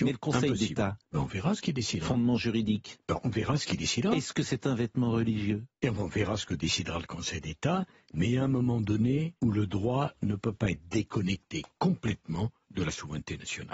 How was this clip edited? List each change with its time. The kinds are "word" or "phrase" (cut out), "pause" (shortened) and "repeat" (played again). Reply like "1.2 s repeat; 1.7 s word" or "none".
1.0 s pause; 5.7 s pause; 9.4 s pause